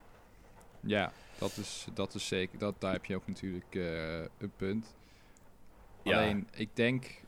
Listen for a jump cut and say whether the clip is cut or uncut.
uncut